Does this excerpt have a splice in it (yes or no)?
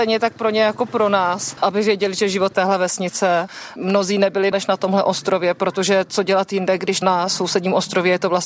yes